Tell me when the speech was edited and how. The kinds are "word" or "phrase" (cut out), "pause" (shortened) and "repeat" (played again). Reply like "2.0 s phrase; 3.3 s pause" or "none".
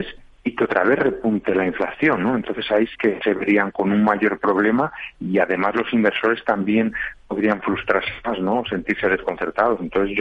2.9 s word